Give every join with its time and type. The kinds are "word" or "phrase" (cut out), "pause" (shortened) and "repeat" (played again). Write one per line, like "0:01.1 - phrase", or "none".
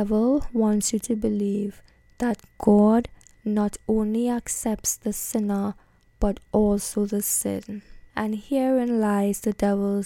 0:08.1 - pause